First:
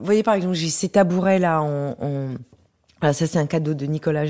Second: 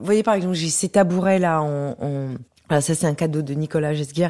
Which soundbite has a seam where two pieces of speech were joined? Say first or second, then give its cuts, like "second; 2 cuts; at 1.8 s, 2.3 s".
second; 1 cut; at 2.5 s